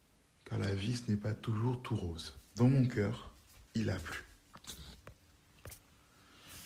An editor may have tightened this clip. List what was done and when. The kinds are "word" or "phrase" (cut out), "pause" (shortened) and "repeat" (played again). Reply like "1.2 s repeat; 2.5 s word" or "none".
2.5 s pause; 3.7 s pause